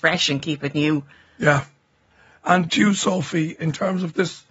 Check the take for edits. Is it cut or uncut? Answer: cut